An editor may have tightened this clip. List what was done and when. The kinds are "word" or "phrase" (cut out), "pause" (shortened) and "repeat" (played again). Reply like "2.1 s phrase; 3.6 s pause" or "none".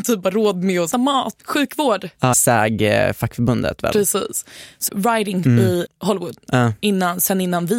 0.9 s word; 1.4 s word; 2.3 s word; 4.9 s phrase; 5.4 s word; 5.8 s word